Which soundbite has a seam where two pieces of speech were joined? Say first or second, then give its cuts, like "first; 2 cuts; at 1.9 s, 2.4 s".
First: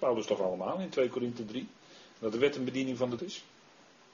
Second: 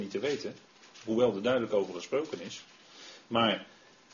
first; 1 cut; at 3.2 s